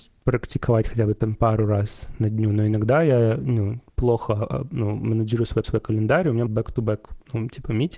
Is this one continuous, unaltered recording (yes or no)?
no